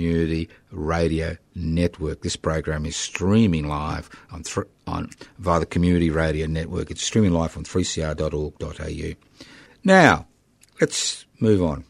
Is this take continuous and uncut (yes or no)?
no